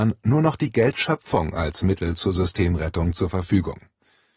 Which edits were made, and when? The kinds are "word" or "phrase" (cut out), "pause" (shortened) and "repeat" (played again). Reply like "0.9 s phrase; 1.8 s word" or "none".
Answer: none